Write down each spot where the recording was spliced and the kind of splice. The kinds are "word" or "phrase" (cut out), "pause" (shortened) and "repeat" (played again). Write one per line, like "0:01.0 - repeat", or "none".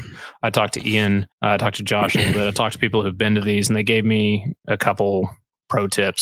0:01.3 - pause